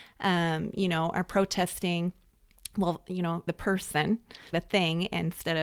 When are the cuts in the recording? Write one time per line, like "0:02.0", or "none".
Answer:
0:03.5
0:04.5